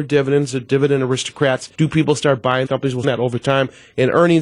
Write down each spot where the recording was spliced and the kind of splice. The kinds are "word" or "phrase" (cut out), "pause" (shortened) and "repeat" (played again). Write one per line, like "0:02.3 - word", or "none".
0:01.7 - pause
0:02.7 - word
0:03.0 - phrase